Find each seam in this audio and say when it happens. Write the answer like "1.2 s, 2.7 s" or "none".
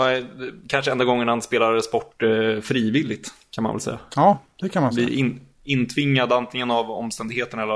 none